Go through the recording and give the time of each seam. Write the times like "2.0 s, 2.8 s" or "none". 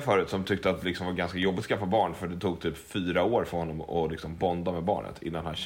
none